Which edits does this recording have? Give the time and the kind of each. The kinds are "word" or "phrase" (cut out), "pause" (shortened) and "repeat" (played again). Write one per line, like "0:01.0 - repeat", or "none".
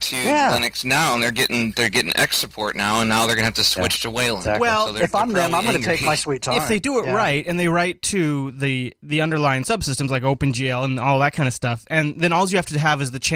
none